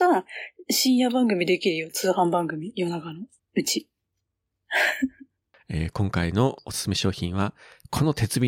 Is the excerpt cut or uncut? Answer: cut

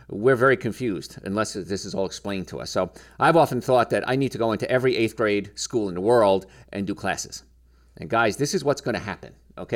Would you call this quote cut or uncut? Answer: uncut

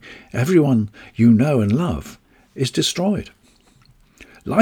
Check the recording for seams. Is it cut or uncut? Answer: uncut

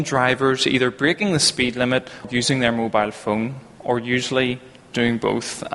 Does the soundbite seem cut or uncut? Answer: cut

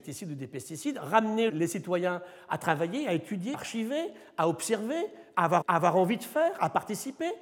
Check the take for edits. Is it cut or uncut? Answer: cut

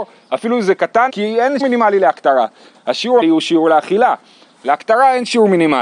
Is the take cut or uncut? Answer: cut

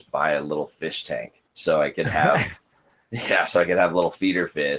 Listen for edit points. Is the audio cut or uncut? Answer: cut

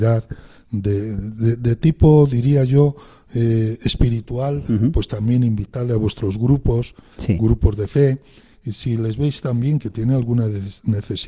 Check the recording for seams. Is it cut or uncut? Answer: uncut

